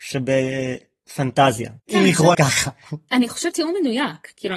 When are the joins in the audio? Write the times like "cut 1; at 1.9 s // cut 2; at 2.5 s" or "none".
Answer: cut 1; at 1.8 s // cut 2; at 2.3 s // cut 3; at 3.5 s